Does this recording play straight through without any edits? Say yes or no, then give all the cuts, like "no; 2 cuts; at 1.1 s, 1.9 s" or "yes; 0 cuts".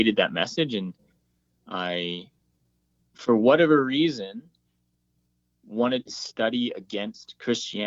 yes; 0 cuts